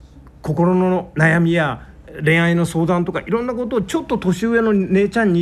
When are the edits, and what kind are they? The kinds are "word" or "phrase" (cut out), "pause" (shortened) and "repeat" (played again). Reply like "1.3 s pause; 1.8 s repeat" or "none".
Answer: 1.1 s word